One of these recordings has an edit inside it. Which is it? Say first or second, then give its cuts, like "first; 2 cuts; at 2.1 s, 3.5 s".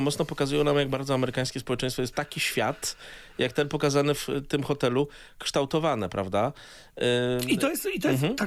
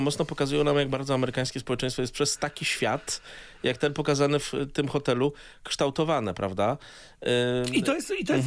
first; 1 cut; at 2.1 s